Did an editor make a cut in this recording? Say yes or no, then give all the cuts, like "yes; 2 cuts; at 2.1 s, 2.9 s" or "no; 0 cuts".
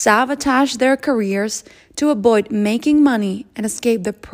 no; 0 cuts